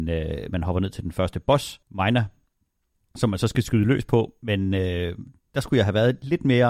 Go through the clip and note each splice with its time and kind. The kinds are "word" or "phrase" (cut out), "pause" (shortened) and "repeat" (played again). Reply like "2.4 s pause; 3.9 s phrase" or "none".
1.8 s pause